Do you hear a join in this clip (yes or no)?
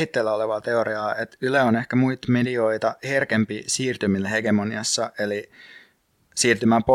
no